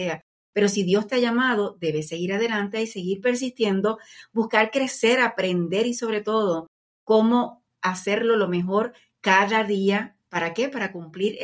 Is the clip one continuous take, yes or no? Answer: yes